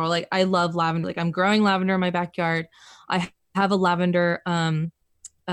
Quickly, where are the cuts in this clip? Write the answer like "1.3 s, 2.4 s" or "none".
1.0 s

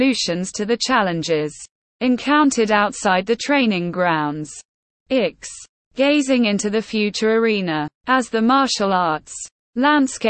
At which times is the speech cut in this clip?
1.8 s, 8.0 s

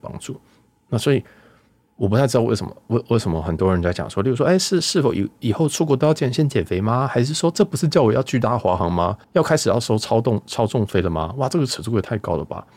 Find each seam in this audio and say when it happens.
9.2 s

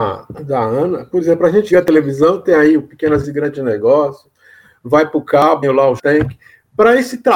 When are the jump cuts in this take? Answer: 1.7 s, 3.2 s, 5.6 s, 6.0 s

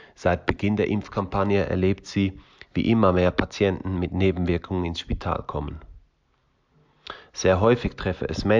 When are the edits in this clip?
none

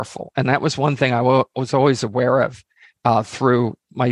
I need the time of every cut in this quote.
none

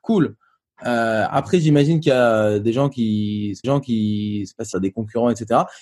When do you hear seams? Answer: 3.6 s, 4.7 s

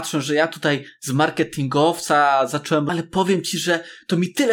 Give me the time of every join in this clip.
2.9 s

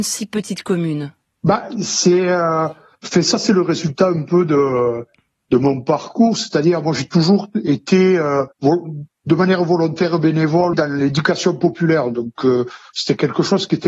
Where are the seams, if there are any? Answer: 8.5 s, 10.7 s

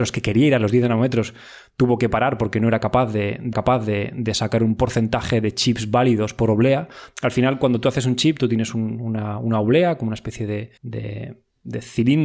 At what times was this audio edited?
3.5 s, 10.8 s

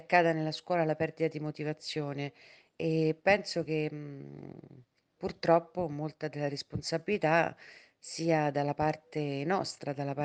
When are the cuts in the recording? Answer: none

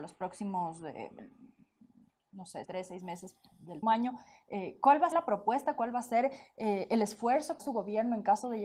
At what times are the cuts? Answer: 2.6 s, 3.8 s, 5.1 s, 7.6 s

